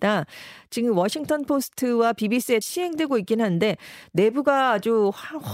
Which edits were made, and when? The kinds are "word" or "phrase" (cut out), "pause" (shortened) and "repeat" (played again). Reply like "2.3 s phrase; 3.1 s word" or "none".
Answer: 2.6 s phrase